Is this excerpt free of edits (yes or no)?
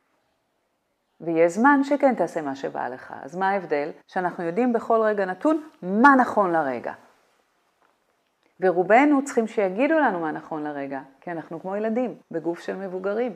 no